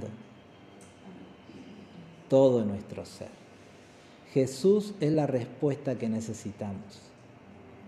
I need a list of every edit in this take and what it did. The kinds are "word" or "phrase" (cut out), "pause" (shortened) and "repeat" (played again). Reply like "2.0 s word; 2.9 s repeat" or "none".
none